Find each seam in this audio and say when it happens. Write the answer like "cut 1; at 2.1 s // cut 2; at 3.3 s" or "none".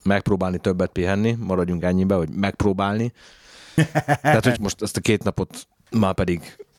cut 1; at 4.5 s